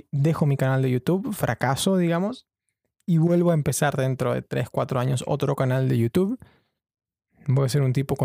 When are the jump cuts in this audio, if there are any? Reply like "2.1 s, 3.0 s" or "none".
none